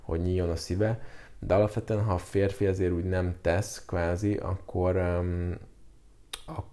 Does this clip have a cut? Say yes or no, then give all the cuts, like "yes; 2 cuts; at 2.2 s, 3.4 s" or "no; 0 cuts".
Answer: no; 0 cuts